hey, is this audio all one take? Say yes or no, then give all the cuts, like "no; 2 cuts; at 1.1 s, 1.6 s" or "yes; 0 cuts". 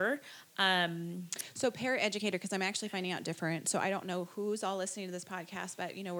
no; 1 cut; at 3.2 s